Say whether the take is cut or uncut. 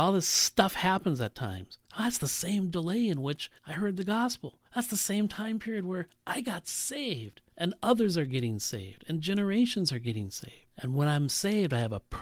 cut